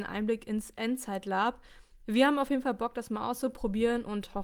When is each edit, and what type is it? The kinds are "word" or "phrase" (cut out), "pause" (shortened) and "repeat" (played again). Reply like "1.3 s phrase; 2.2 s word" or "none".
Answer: none